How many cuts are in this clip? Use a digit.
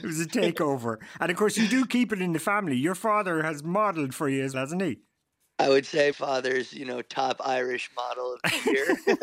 2